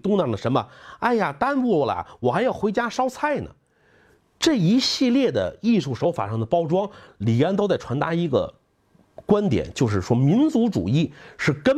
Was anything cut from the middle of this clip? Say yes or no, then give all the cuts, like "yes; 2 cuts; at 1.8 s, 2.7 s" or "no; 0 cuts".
no; 0 cuts